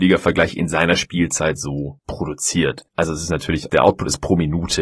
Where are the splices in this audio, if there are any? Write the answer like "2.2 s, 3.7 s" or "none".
none